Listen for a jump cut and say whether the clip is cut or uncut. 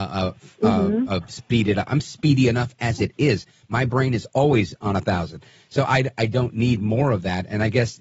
uncut